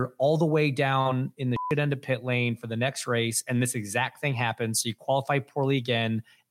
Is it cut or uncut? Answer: uncut